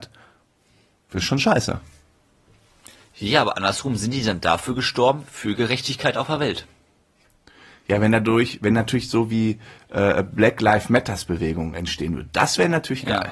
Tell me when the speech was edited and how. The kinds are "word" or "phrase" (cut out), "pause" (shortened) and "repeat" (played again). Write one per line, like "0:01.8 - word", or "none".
none